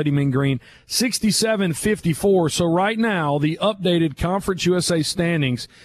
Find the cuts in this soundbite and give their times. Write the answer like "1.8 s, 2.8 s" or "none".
none